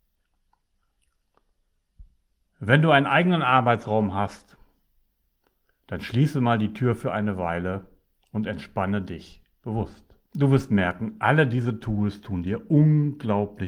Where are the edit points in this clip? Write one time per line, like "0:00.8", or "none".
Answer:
0:10.3